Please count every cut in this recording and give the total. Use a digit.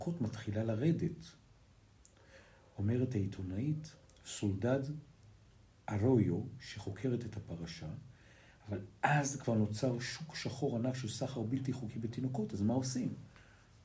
0